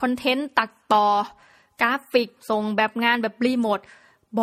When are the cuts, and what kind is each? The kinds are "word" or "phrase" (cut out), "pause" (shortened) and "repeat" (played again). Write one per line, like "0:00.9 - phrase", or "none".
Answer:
none